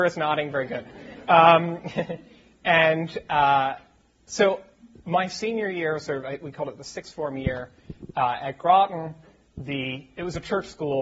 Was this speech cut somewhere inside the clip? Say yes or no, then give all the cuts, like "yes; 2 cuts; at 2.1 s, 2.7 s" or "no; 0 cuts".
no; 0 cuts